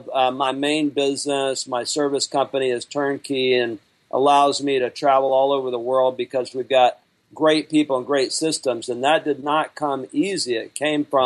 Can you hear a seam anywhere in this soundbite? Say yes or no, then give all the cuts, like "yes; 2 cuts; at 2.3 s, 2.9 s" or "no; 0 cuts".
no; 0 cuts